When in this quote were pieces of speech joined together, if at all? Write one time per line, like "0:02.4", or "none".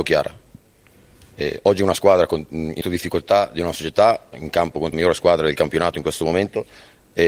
0:02.8
0:04.3
0:04.9